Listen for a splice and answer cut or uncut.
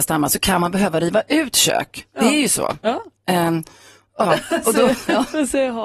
cut